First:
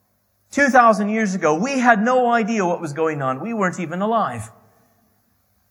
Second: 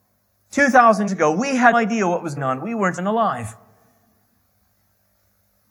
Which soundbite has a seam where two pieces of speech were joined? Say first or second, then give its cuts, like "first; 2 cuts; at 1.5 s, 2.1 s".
second; 4 cuts; at 1.1 s, 1.7 s, 2.4 s, 3.0 s